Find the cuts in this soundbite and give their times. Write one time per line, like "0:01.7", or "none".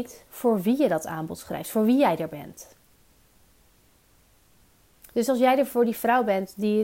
none